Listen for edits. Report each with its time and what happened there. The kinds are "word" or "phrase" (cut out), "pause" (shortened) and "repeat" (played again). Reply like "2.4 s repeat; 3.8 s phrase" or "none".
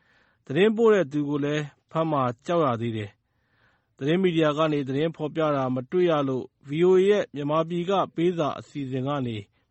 none

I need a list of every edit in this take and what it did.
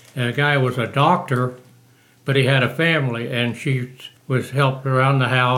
4.2 s pause

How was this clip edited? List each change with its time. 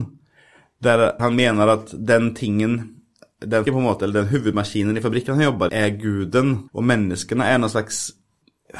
1.2 s word; 3.7 s word; 5.7 s word; 6.7 s pause

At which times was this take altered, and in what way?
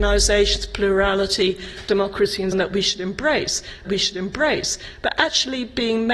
2.5 s word; 3.8 s repeat

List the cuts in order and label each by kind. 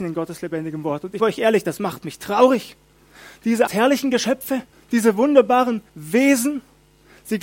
1.2 s word; 3.7 s word; 4.7 s pause; 5.9 s pause

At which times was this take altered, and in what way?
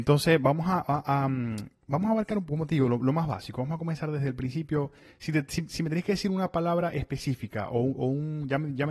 none

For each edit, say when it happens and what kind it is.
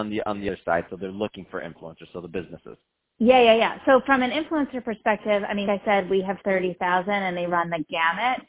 2.9 s pause; 5.7 s word; 7.5 s word

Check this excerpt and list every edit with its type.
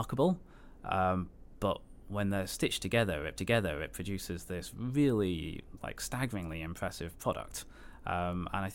3.4 s repeat

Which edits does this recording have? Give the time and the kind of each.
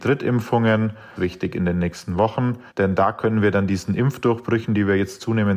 1.2 s phrase; 2.7 s pause

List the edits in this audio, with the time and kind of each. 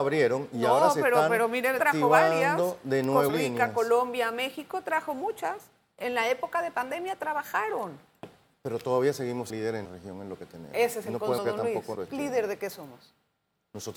1.8 s word; 3.3 s word; 9.5 s word; 9.8 s word; 11.4 s word; 11.9 s word

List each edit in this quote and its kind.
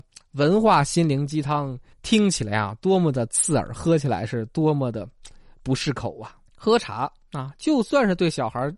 1.9 s pause; 6.5 s pause

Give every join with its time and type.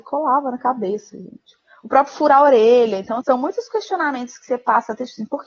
3.2 s word

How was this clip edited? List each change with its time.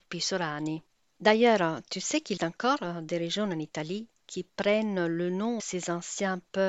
2.4 s word; 5.6 s word

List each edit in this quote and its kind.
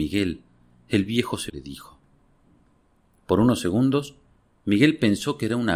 1.5 s word

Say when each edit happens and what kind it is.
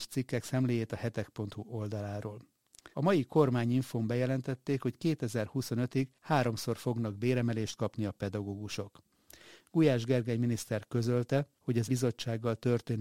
2.9 s pause; 6.2 s pause; 11.6 s pause; 11.9 s word

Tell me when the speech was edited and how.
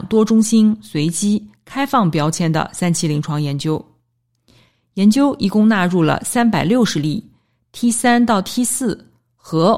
none

